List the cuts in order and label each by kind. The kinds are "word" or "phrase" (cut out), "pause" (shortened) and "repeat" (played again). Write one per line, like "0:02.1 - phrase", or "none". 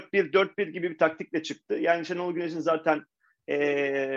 none